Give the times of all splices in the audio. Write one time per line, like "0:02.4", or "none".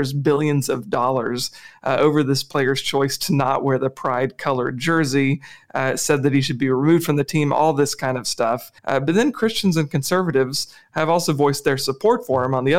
0:08.8